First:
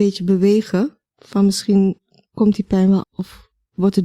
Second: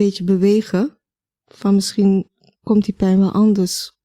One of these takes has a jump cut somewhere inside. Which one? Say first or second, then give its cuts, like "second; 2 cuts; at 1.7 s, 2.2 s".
first; 2 cuts; at 1.1 s, 3.0 s